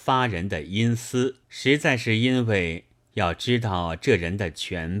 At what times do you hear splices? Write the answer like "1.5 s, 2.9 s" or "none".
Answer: 1.4 s